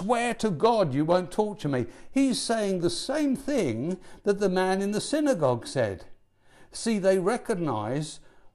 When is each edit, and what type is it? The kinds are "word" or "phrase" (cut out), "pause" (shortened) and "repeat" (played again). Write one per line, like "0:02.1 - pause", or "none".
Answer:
none